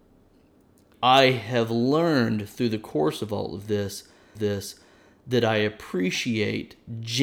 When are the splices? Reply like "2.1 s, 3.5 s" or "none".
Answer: 0.9 s, 4.4 s